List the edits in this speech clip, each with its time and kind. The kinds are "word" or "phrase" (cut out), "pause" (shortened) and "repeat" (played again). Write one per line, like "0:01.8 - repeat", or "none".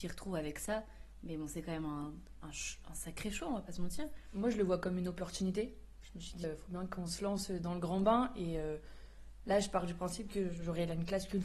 0:06.4 - word